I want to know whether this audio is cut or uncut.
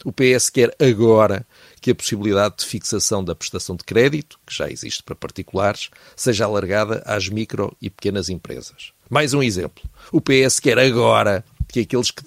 uncut